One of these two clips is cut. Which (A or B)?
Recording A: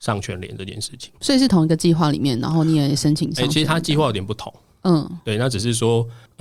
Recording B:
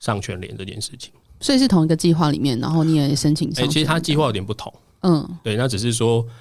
A